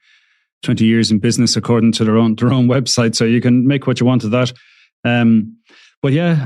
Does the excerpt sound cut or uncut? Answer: uncut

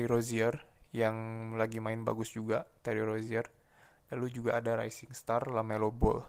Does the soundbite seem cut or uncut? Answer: uncut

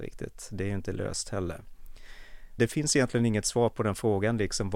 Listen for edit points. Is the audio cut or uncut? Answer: uncut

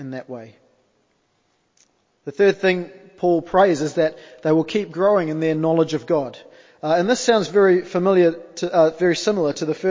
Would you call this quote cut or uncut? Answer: uncut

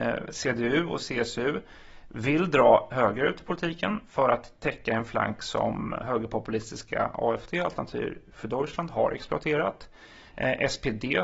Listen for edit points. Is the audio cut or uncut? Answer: uncut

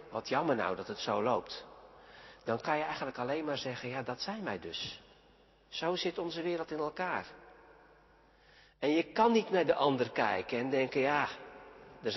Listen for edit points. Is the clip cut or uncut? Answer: uncut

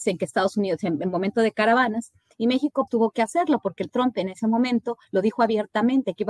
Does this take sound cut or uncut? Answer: cut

